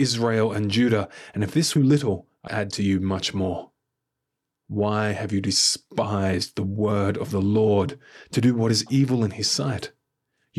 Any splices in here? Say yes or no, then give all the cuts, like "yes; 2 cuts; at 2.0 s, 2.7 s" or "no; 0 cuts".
yes; 2 cuts; at 1.8 s, 2.5 s